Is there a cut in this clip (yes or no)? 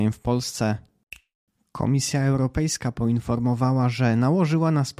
no